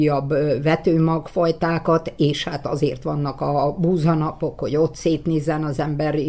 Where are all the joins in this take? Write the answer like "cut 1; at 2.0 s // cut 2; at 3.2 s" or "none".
none